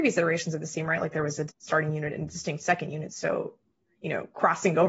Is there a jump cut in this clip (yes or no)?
yes